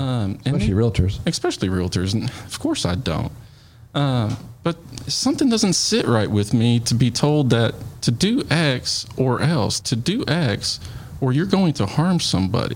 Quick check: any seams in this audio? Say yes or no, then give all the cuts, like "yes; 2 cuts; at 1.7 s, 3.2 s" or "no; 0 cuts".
yes; 1 cut; at 9.8 s